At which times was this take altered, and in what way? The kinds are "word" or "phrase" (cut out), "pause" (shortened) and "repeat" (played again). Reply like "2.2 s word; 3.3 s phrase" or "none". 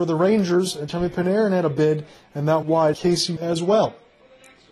2.6 s word; 2.9 s word; 3.4 s word